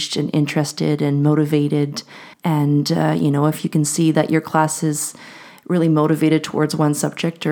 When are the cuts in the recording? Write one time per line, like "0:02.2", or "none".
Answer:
0:02.3